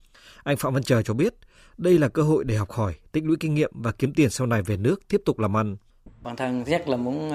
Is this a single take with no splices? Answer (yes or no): yes